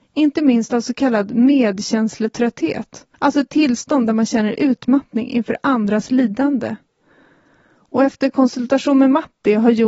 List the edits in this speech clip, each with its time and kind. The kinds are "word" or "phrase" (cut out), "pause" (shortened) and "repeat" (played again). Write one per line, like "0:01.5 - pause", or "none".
0:03.1 - pause

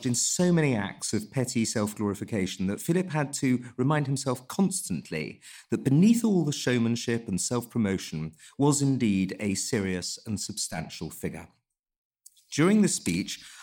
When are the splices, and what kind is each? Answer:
none

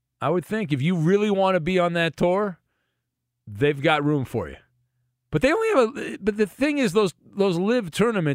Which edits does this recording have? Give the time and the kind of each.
none

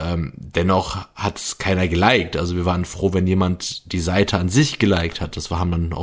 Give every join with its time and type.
none

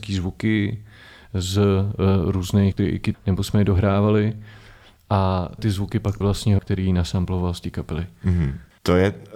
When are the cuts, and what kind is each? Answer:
0:02.7 - word
0:03.1 - word
0:05.6 - word
0:06.2 - word
0:06.6 - phrase

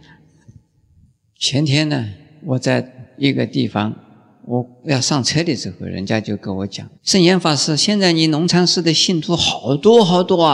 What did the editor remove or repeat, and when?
0:07.0 - pause

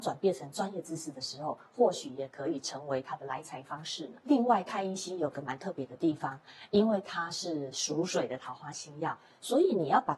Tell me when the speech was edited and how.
none

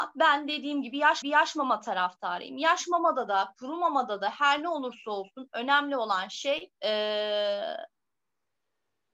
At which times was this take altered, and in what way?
0:01.2 - repeat
0:06.7 - pause

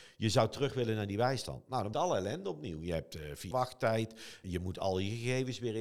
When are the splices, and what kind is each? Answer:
0:01.9 - word
0:03.5 - word
0:04.4 - word

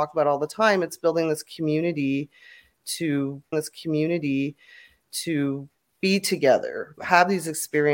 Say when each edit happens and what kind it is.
0:03.5 - repeat
0:07.0 - word

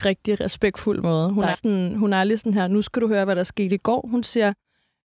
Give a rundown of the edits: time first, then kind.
0:01.5 - word

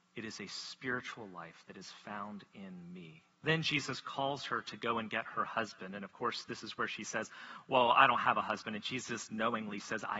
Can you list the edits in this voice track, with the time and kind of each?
0:03.3 - pause

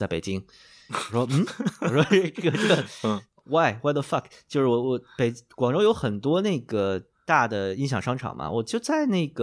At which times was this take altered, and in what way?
none

